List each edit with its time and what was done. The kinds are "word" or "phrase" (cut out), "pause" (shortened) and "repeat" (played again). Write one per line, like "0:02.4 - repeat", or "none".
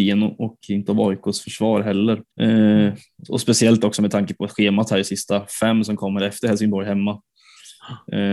0:02.3 - pause